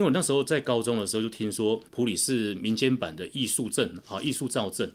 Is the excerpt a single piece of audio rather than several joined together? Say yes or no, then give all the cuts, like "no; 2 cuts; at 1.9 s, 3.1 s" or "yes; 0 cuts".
no; 1 cut; at 1.9 s